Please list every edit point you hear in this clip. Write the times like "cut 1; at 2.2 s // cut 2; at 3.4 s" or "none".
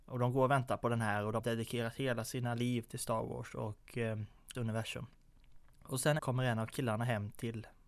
cut 1; at 1.4 s // cut 2; at 4.5 s // cut 3; at 5.7 s // cut 4; at 6.2 s